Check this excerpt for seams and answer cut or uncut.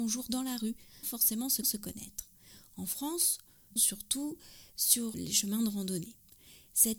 cut